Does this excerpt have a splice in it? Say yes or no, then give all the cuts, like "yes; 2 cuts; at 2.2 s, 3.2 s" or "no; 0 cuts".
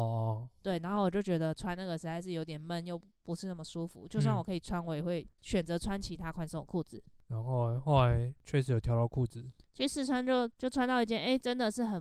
no; 0 cuts